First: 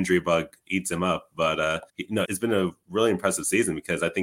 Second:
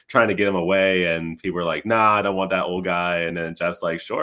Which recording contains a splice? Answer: first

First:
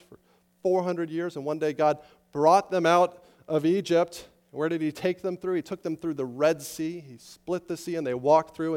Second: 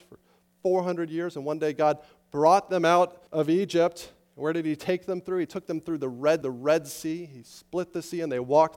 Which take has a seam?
second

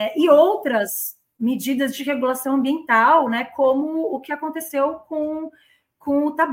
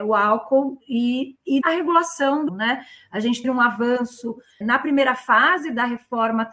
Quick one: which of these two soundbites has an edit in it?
second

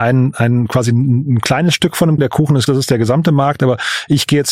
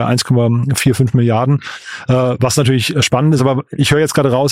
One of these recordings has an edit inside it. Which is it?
first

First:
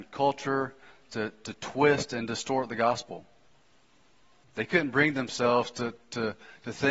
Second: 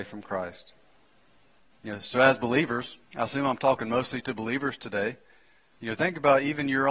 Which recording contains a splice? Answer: second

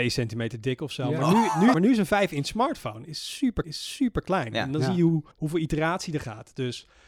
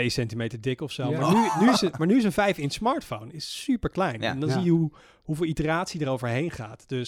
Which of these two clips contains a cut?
first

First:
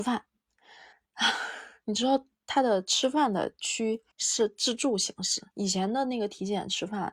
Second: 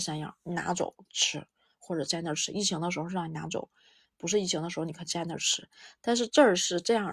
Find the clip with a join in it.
first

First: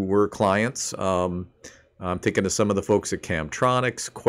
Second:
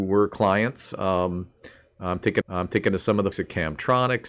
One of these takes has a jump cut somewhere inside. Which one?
second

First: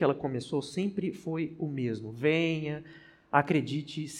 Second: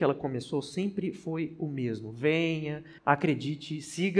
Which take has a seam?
second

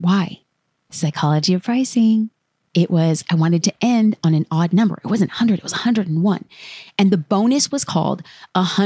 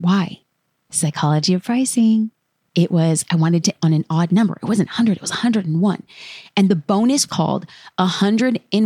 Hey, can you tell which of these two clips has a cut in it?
second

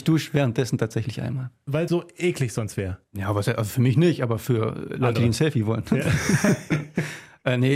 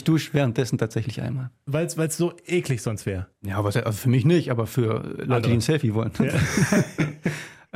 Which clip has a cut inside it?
first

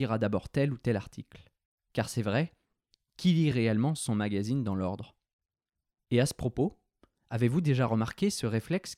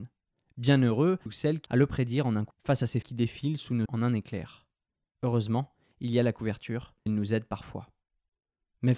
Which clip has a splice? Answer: second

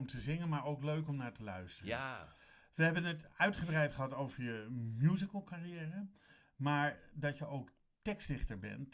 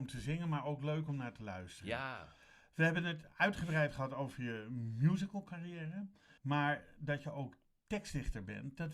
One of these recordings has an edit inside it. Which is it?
second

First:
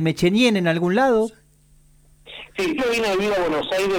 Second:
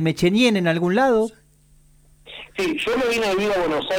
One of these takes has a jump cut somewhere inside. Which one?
first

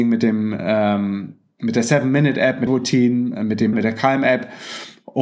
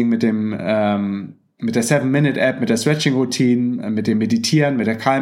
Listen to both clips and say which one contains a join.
first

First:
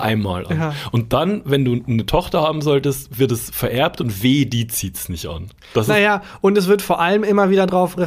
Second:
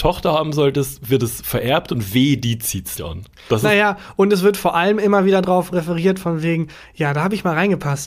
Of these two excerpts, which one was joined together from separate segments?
second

